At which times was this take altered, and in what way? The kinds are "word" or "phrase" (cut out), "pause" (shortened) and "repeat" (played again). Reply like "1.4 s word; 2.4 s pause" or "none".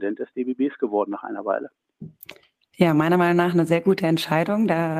none